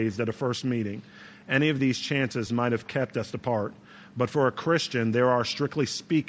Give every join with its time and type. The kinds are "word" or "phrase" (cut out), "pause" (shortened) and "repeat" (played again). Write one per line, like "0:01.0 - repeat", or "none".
none